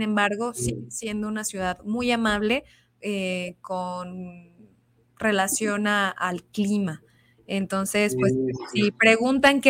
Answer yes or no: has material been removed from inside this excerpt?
no